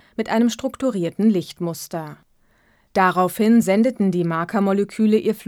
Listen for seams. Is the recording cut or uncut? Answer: uncut